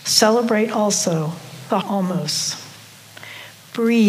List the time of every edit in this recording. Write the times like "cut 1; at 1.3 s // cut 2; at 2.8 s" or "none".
cut 1; at 1.8 s